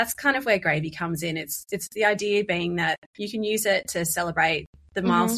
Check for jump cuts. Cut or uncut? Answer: cut